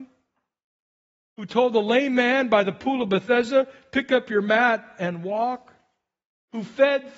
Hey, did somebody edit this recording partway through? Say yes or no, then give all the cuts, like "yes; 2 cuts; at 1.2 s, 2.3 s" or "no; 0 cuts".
no; 0 cuts